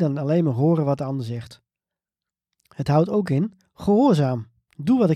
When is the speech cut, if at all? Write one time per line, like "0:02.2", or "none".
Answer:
0:02.3